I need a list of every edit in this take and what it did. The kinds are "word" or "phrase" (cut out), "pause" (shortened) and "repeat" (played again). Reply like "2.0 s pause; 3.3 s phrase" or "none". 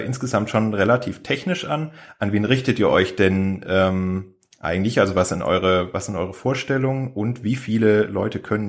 none